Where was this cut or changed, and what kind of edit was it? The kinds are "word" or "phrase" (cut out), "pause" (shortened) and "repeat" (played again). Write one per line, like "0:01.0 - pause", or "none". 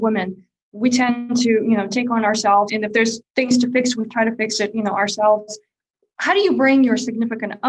0:02.7 - word
0:03.2 - word